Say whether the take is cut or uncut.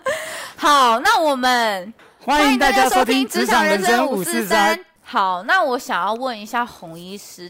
uncut